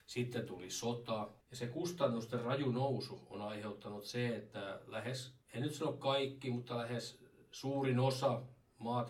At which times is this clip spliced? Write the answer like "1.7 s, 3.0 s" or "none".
1.4 s, 5.4 s

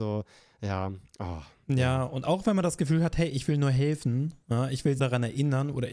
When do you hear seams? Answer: 5.0 s

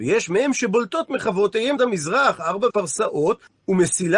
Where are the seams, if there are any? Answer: 1.8 s, 2.7 s

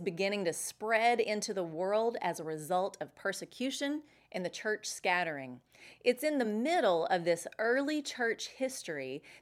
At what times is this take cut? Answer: none

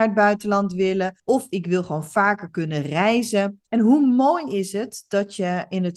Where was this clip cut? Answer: 1.2 s, 3.7 s

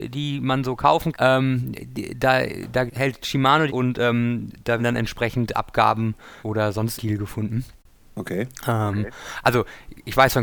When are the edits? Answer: 1.1 s, 2.9 s, 3.7 s, 4.8 s, 6.4 s, 7.0 s

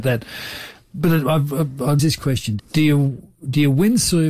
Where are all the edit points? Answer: 2.0 s, 2.6 s

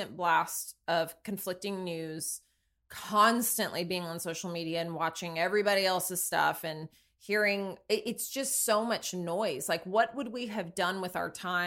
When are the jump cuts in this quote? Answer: none

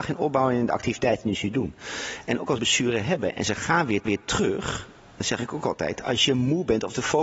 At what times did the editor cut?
2.6 s, 4.1 s

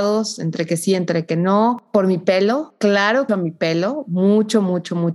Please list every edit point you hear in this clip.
3.3 s

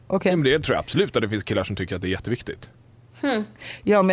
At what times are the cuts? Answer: none

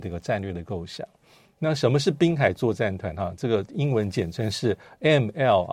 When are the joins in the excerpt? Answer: none

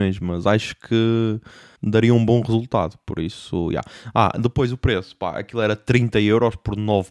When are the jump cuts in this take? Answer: none

